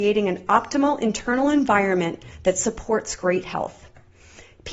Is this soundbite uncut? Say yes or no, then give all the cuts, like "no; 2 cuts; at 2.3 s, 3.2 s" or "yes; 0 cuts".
yes; 0 cuts